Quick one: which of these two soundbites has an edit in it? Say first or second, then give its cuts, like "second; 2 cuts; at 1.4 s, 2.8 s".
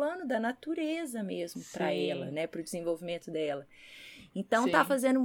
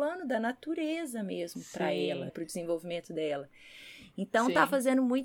second; 1 cut; at 2.3 s